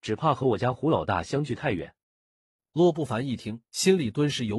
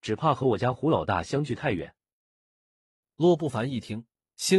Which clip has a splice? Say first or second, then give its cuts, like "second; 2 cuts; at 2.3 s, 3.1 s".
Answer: first; 2 cuts; at 2.0 s, 3.7 s